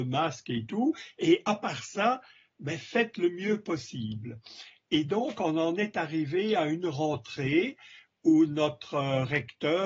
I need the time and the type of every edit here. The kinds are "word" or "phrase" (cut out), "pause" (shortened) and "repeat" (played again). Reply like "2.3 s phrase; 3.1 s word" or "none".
none